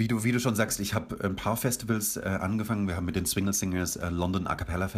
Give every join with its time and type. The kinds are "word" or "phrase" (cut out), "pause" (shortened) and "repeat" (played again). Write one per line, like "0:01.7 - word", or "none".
none